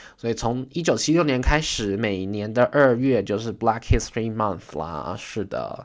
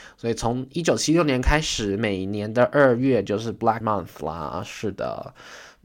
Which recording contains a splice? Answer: second; 1 cut; at 3.8 s

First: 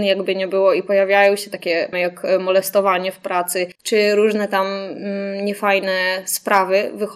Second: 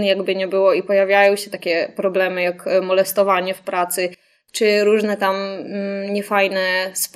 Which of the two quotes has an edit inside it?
first; 2 cuts; at 1.9 s, 3.8 s

